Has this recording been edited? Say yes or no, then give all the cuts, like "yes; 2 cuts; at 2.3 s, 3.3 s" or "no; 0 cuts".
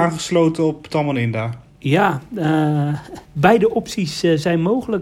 yes; 1 cut; at 3.2 s